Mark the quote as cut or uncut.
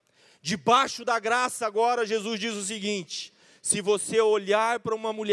uncut